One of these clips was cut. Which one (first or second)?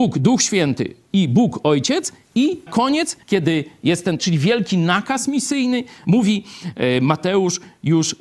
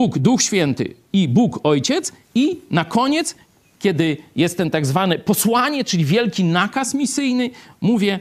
first